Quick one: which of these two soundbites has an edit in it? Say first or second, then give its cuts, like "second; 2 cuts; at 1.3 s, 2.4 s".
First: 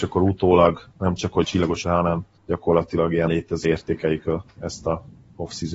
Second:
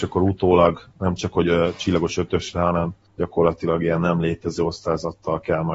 first; 4 cuts; at 1.4 s, 1.8 s, 3.3 s, 3.6 s